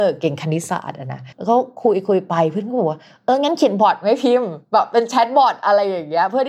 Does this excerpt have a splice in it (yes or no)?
yes